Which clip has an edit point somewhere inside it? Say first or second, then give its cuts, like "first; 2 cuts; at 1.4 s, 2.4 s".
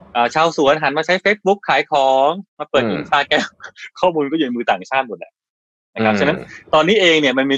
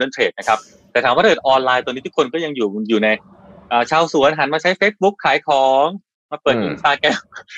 first; 1 cut; at 2.5 s